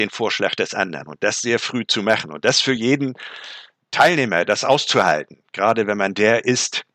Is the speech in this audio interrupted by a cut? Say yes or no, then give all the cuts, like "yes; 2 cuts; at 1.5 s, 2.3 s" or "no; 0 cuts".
no; 0 cuts